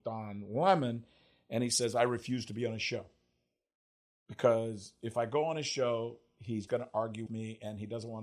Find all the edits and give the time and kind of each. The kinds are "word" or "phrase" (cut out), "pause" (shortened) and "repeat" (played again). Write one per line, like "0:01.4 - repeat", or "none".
0:06.7 - word
0:07.3 - word